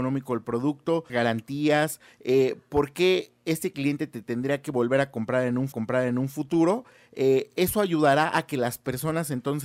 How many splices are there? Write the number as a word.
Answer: two